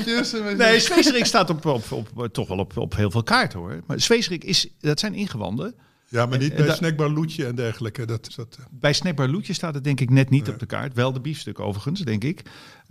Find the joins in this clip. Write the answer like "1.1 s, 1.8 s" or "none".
8.3 s